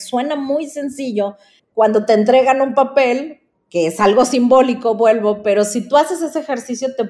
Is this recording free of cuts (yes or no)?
yes